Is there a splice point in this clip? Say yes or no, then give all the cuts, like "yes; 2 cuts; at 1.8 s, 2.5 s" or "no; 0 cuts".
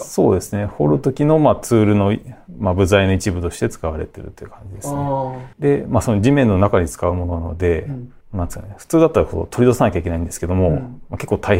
yes; 2 cuts; at 5.5 s, 8.2 s